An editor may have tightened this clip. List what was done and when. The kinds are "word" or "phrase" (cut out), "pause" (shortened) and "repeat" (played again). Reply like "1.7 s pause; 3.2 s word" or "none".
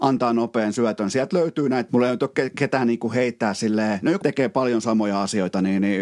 1.9 s word; 4.2 s phrase